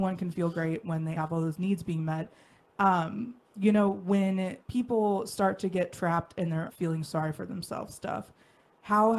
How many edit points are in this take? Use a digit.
4